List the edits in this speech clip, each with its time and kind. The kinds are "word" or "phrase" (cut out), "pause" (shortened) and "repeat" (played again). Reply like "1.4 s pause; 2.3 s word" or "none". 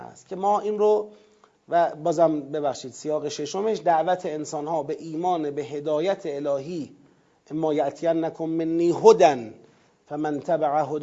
none